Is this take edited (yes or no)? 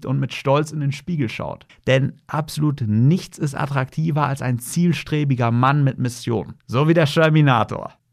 yes